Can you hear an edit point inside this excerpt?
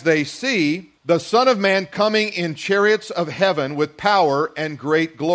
yes; 1 cut; at 1.0 s

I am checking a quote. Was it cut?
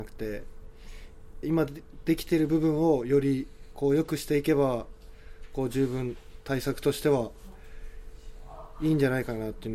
yes; 1 cut; at 1.4 s

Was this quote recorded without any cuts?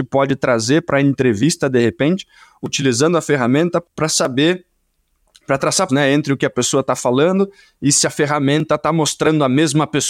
no; 1 cut; at 5.9 s

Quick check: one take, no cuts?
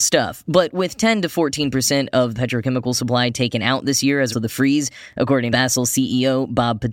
no; 3 cuts; at 2.3 s, 4.3 s, 5.5 s

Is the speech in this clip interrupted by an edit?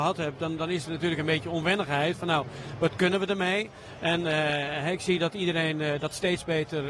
no; 0 cuts

